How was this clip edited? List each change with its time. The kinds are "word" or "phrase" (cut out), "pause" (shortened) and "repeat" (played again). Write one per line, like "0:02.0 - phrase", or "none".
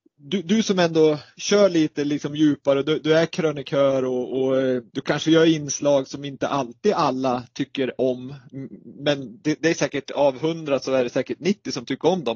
0:04.9 - pause